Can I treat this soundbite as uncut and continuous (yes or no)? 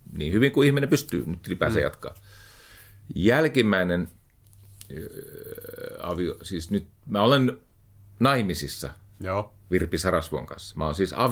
yes